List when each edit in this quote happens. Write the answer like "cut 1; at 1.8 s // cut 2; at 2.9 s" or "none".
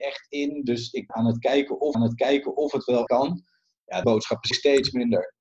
cut 1; at 1.1 s // cut 2; at 1.9 s // cut 3; at 3.1 s // cut 4; at 4.0 s // cut 5; at 4.5 s